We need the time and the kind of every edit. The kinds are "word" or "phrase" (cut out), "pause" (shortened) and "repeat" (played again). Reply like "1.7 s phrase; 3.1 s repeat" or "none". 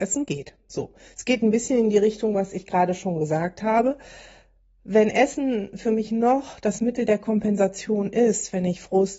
none